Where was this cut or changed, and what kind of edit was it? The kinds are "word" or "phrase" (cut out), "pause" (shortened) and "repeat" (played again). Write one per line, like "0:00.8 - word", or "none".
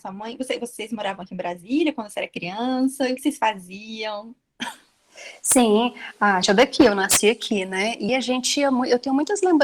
0:03.2 - word
0:06.4 - word
0:08.1 - word